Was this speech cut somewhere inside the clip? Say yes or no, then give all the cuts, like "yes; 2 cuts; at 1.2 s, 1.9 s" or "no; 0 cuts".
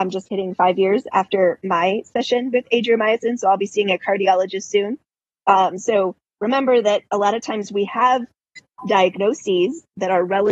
no; 0 cuts